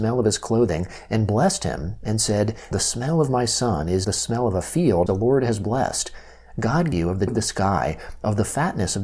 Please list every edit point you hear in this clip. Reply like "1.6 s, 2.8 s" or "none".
2.7 s, 4.0 s, 5.1 s, 6.9 s, 7.3 s